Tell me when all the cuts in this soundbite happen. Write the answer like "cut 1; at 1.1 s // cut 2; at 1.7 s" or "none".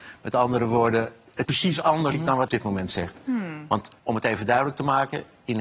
cut 1; at 1.4 s // cut 2; at 2.1 s // cut 3; at 2.5 s // cut 4; at 4.0 s